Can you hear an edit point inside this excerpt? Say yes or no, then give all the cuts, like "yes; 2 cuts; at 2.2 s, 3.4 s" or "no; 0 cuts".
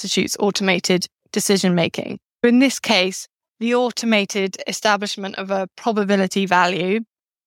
no; 0 cuts